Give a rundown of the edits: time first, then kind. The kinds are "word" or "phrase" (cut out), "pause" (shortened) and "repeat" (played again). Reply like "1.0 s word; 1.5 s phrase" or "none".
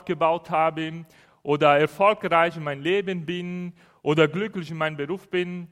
none